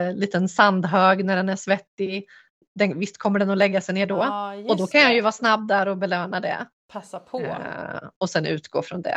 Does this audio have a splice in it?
no; 0 cuts

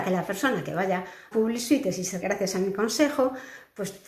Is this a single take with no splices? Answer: no; 2 cuts; at 1.3 s, 2.2 s

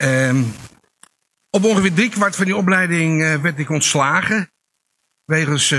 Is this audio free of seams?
yes; 0 cuts

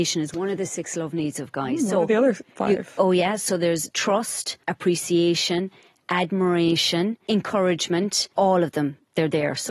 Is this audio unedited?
yes; 0 cuts

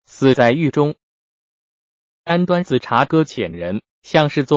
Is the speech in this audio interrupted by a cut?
no; 0 cuts

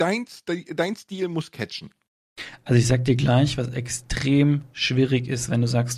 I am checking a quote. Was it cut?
no; 0 cuts

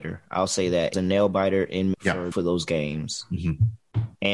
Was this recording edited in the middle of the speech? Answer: yes; 3 cuts; at 0.9 s, 1.9 s, 2.3 s

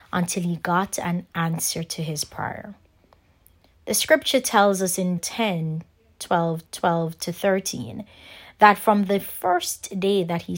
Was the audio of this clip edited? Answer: yes; 2 cuts; at 5.2 s, 6.7 s

